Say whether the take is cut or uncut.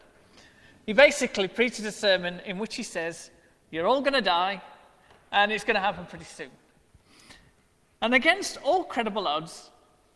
uncut